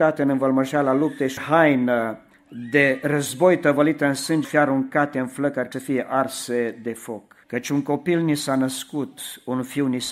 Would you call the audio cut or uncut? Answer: cut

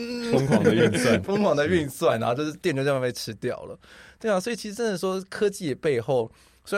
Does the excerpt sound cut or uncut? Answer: cut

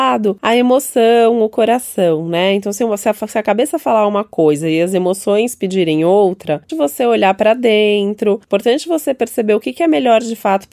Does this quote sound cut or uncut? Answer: cut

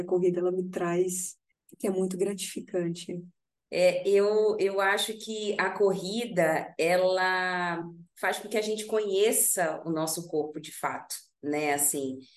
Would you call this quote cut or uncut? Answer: uncut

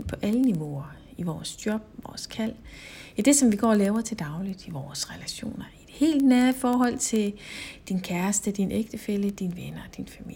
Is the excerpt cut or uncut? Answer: uncut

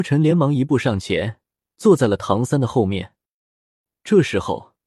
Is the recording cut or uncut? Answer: uncut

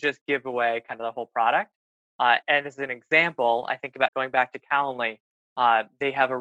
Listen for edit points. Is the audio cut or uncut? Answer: cut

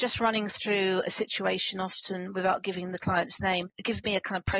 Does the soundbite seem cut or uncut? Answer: uncut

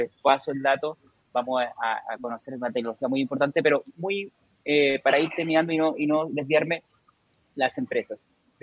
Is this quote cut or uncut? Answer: uncut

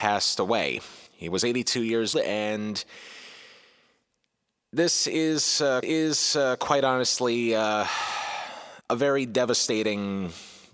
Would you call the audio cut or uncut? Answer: cut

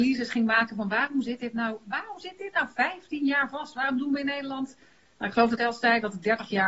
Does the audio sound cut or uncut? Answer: cut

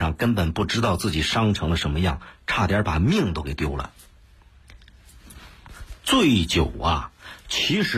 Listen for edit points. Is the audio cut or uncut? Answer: uncut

